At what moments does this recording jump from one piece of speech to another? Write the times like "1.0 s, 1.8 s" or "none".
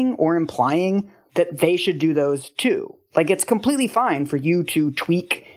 none